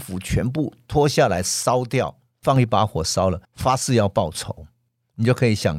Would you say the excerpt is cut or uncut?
cut